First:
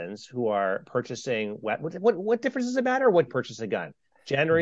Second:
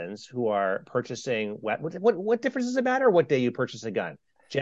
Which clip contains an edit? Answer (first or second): first